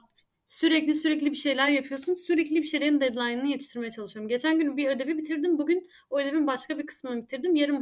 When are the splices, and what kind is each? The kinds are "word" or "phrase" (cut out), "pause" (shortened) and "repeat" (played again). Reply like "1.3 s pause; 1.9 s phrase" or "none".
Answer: none